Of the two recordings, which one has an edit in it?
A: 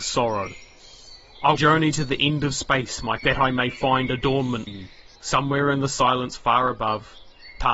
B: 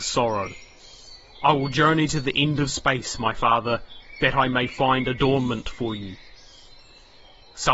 A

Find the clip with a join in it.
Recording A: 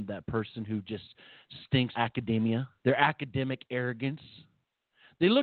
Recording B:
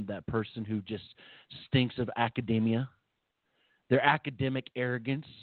A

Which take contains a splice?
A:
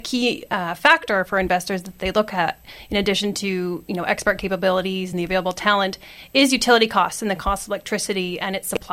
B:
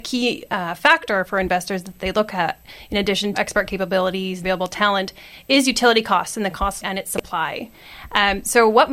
B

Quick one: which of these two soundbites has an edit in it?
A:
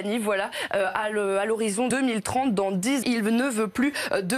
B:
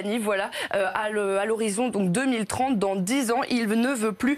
A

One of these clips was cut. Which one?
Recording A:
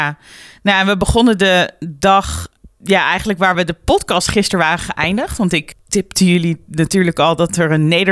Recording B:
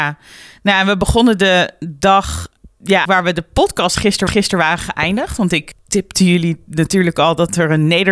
B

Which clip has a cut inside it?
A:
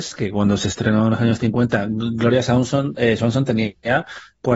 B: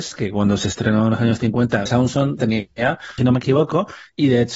B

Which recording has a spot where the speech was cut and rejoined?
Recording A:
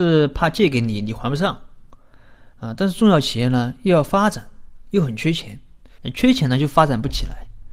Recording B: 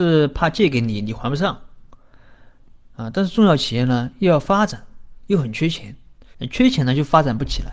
A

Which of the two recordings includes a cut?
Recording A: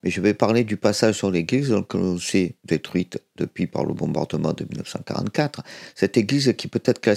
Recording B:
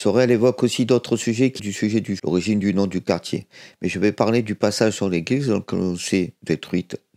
B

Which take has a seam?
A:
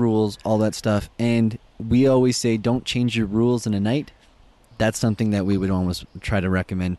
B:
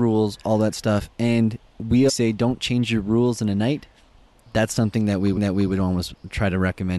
B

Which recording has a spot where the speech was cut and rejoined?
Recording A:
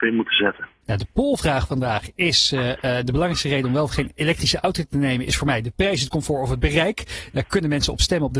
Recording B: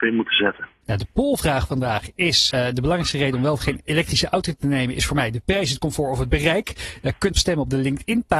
B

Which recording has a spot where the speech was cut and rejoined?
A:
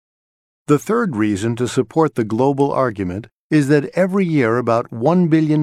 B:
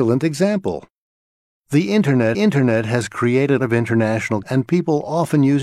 B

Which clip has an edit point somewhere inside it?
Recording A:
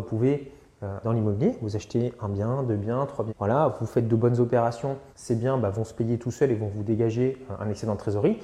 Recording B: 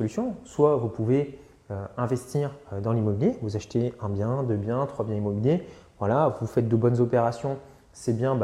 A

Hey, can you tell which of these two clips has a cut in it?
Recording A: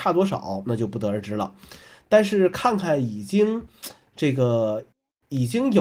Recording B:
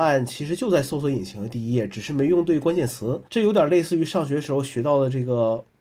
B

